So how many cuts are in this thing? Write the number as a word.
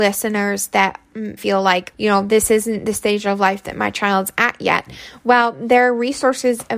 two